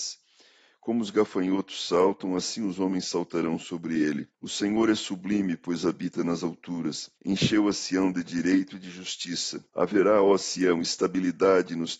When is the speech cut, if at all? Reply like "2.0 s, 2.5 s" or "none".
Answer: 4.3 s, 7.2 s, 9.7 s